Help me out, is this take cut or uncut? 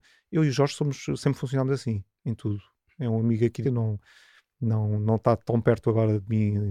cut